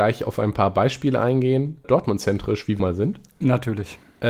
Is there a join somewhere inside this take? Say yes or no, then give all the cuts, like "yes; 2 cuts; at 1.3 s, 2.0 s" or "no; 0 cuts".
yes; 2 cuts; at 1.8 s, 2.8 s